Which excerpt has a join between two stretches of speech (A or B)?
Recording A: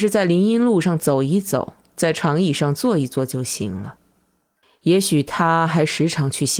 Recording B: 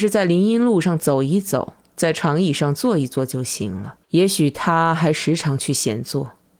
B